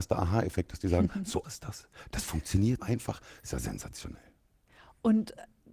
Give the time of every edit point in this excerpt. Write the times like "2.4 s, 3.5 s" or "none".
1.4 s, 2.8 s

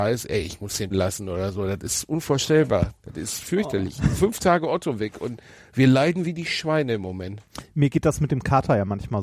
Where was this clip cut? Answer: 0.9 s

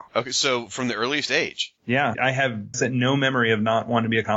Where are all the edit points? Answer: 2.1 s, 2.7 s

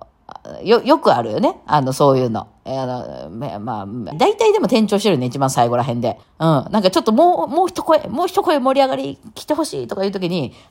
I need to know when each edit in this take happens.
4.1 s, 6.2 s

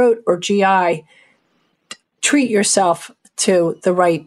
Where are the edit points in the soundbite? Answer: none

